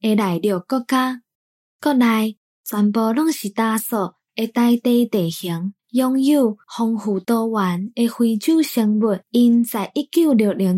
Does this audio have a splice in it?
yes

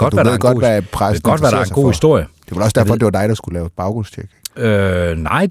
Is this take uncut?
yes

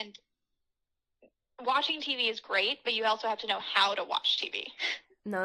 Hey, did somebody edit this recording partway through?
no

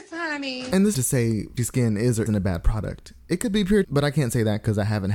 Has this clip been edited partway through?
yes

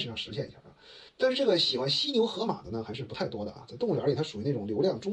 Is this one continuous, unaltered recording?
no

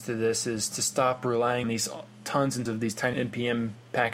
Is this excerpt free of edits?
no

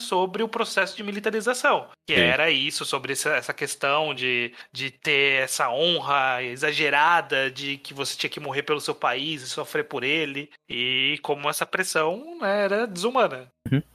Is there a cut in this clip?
no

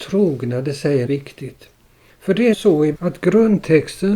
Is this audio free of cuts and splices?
no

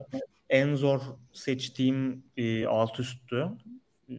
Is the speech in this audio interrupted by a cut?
no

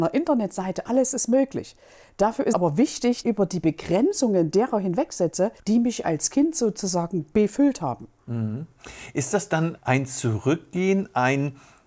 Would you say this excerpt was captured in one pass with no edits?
no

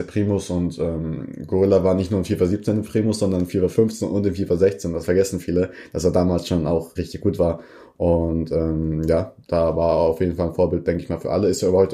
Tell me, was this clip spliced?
yes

